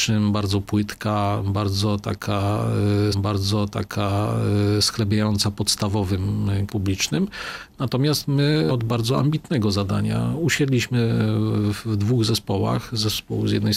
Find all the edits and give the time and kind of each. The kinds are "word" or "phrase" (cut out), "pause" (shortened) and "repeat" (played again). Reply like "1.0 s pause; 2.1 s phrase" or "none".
3.1 s repeat; 6.7 s phrase; 8.7 s word